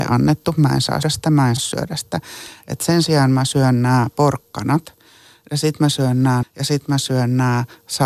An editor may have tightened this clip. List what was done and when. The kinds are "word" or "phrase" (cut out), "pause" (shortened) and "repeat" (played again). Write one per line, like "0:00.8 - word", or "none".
0:01.0 - word
0:01.6 - word
0:06.4 - word